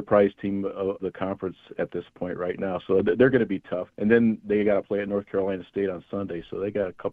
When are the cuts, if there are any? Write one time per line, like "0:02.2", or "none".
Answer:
0:01.0
0:03.9

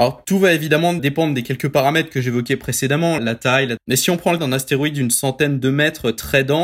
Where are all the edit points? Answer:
0:01.0
0:03.2
0:03.8
0:04.4

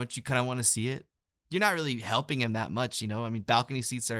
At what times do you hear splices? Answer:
0:01.3

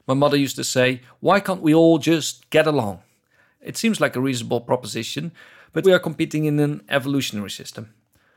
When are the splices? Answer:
0:05.8

